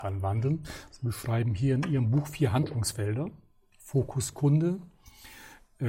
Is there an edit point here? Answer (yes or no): no